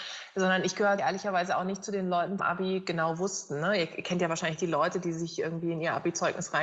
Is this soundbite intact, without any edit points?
no; 2 cuts; at 1.0 s, 2.4 s

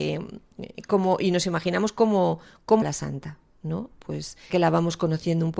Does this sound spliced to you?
yes; 2 cuts; at 2.8 s, 4.5 s

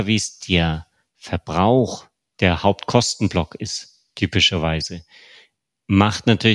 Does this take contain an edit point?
no; 0 cuts

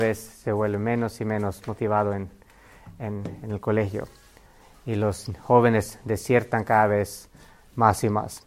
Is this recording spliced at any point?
no; 0 cuts

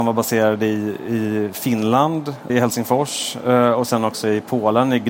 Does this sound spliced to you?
yes; 1 cut; at 2.5 s

